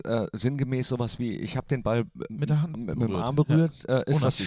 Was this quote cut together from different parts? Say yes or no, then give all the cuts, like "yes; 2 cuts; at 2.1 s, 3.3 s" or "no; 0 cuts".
yes; 1 cut; at 2.3 s